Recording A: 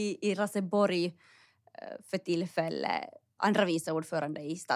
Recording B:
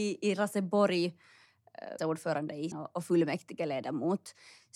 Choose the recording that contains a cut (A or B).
B